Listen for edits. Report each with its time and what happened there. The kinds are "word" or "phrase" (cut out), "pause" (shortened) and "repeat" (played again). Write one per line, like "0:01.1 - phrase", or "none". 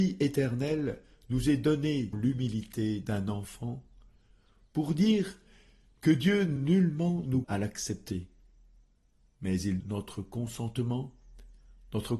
0:02.1 - word
0:06.6 - word
0:07.4 - word
0:09.8 - word